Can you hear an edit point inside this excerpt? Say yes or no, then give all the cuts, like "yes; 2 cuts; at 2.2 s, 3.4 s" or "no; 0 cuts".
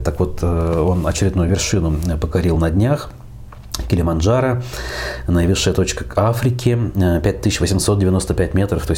no; 0 cuts